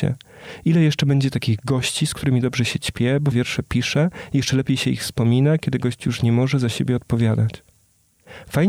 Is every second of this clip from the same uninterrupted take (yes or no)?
no